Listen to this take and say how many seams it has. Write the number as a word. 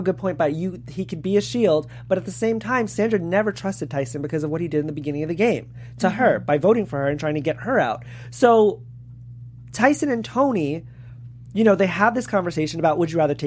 zero